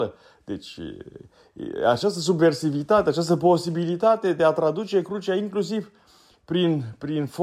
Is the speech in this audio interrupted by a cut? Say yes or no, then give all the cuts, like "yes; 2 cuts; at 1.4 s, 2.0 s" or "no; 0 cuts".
no; 0 cuts